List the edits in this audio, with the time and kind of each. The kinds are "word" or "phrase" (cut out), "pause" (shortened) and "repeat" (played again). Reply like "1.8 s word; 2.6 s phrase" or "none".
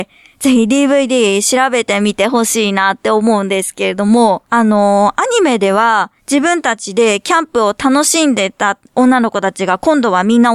4.5 s pause; 6.2 s pause